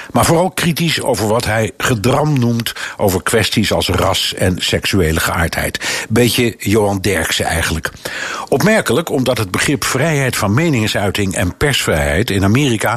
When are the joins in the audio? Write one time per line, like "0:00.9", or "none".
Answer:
none

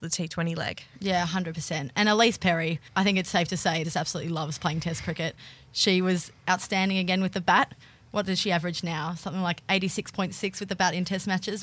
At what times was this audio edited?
0:03.8

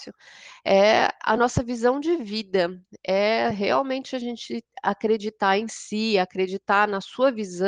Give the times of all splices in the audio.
none

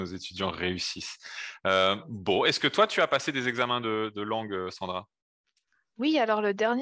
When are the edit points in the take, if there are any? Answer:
none

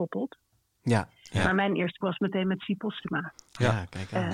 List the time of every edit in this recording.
0:02.0

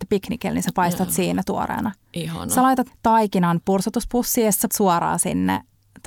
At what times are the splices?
0:02.9
0:04.7

